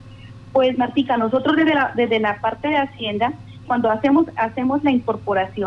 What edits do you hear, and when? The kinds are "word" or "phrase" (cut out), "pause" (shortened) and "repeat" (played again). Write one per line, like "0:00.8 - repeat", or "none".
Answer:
0:03.6 - word